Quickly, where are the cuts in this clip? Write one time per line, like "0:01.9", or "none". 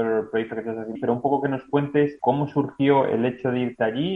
0:01.0
0:02.2